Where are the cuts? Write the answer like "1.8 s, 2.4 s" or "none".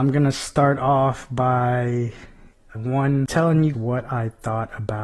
2.7 s, 3.7 s